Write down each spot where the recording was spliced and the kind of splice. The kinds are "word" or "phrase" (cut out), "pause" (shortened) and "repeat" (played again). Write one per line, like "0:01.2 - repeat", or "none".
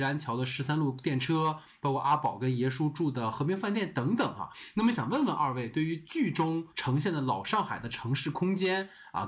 0:06.7 - pause